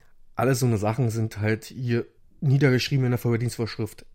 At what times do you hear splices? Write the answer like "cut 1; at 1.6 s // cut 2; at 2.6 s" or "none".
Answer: cut 1; at 2.2 s